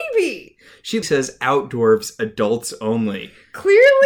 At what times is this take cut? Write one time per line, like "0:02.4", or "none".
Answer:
0:01.0